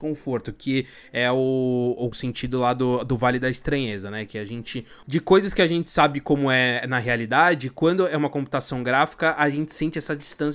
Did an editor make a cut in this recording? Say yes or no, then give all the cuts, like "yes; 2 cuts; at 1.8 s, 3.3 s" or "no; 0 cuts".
no; 0 cuts